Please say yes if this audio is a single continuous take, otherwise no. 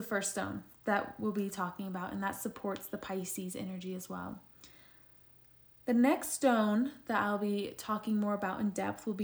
yes